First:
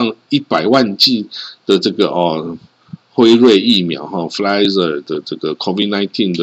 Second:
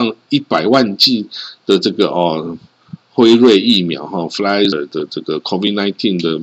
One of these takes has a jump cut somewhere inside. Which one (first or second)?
second